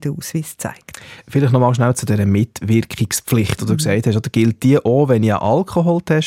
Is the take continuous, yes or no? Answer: yes